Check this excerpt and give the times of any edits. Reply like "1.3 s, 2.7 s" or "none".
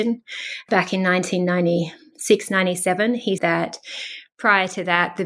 3.4 s